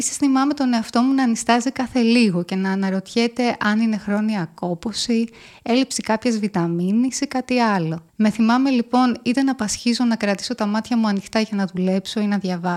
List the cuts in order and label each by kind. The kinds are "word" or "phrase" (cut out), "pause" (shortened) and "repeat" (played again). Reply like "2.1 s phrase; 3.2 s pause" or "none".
8.1 s pause